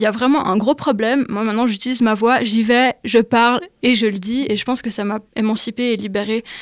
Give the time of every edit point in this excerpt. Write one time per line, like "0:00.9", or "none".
none